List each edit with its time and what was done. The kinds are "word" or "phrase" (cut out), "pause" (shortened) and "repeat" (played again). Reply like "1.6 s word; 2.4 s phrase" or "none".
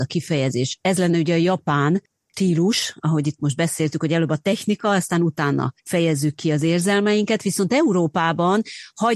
5.8 s pause